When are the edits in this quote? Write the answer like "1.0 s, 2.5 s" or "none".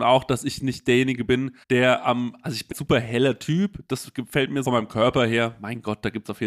1.6 s, 2.7 s, 4.6 s